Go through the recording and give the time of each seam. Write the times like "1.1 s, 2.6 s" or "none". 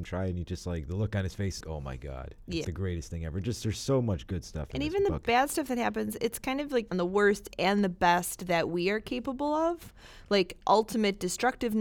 1.6 s, 2.6 s, 6.9 s